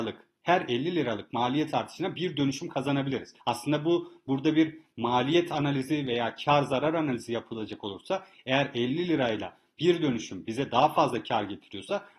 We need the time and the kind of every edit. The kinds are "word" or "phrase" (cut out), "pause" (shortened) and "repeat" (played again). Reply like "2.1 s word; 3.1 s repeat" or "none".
3.4 s pause